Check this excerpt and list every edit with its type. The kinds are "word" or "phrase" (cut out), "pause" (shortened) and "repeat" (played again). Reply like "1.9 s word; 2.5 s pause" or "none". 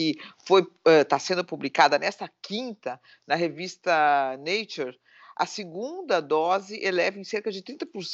none